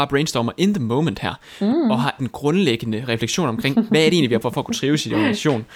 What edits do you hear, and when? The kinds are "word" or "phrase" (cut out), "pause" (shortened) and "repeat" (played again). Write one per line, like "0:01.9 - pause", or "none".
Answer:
0:02.2 - phrase
0:04.4 - word